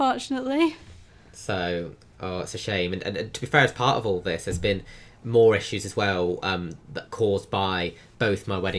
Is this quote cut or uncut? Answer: uncut